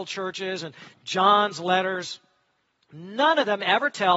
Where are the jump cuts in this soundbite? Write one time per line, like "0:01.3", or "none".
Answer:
none